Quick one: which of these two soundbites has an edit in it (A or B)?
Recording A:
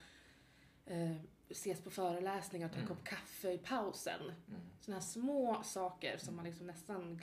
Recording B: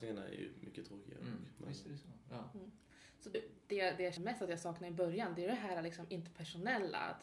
B